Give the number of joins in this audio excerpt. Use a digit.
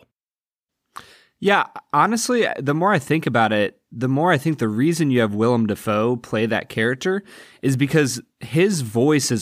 0